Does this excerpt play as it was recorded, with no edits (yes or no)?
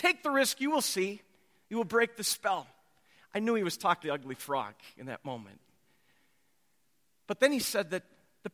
no